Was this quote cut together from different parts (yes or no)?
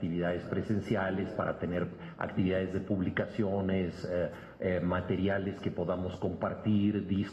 no